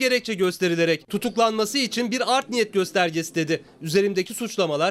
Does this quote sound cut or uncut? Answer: uncut